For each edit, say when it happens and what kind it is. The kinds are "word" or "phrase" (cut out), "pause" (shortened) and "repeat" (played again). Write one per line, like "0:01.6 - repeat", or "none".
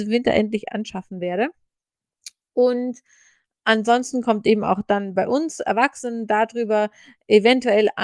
none